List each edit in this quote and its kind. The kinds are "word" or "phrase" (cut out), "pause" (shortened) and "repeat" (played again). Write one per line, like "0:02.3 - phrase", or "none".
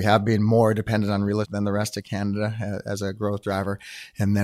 0:01.4 - word